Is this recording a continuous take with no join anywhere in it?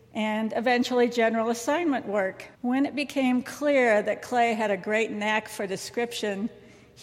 no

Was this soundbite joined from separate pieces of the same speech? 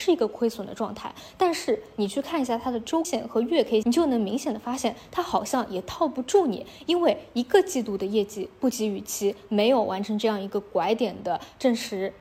yes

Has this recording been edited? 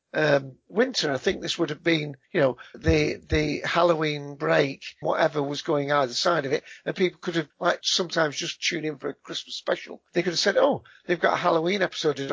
yes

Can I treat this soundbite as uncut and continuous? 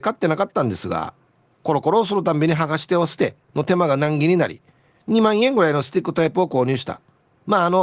yes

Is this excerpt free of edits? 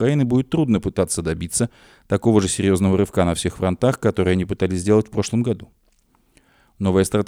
yes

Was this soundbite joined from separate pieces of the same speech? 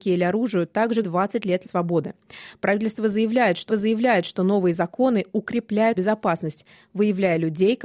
yes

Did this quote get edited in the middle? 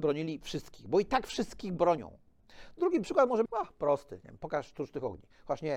yes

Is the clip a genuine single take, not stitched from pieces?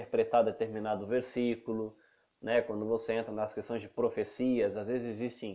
yes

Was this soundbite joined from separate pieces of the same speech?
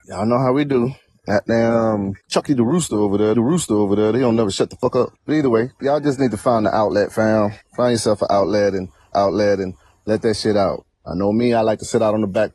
yes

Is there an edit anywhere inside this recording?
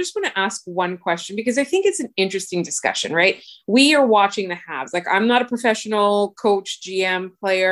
no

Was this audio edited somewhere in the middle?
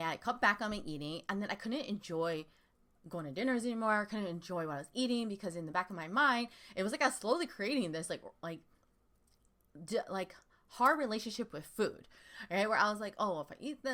no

